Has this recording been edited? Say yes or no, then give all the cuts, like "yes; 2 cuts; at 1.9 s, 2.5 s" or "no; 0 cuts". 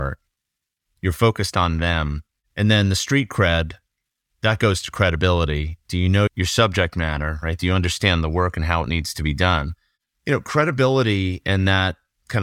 yes; 1 cut; at 6.3 s